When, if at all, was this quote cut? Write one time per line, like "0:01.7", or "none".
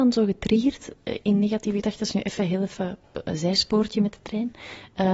none